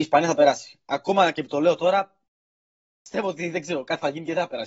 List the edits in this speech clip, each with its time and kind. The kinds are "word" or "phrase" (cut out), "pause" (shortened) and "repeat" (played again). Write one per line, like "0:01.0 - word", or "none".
none